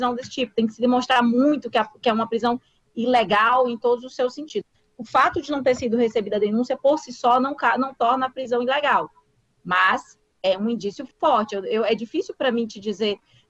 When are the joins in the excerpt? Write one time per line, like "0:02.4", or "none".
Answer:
none

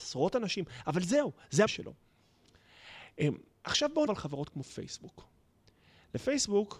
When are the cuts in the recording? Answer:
0:01.7
0:04.1

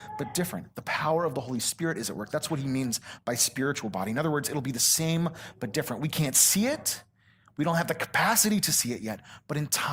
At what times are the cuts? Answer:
none

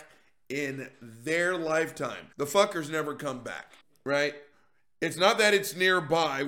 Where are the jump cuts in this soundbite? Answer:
0:02.3
0:03.8

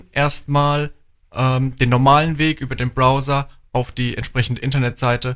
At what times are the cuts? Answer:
none

